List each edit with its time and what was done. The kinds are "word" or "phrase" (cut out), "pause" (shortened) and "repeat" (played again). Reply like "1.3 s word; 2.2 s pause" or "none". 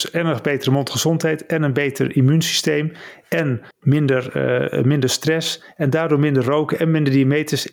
3.7 s pause